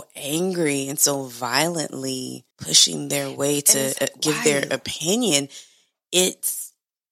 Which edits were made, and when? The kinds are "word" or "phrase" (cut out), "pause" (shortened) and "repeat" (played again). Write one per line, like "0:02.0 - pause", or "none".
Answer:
0:02.5 - pause